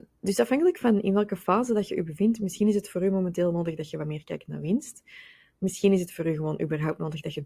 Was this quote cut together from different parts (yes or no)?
no